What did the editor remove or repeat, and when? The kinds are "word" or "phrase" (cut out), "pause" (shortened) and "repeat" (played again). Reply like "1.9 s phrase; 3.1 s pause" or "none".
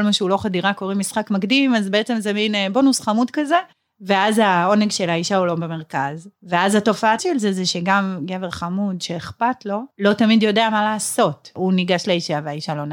3.7 s pause; 6.3 s pause; 7.2 s word